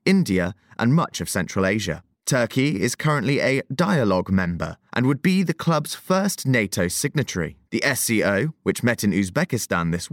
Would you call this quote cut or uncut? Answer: cut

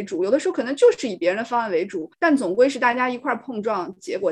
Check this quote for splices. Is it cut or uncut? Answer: cut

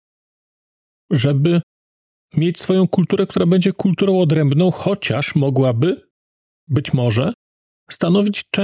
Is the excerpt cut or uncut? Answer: uncut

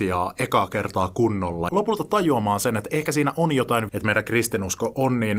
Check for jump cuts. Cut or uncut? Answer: cut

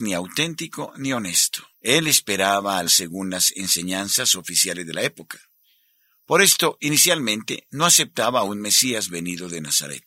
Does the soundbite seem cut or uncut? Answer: cut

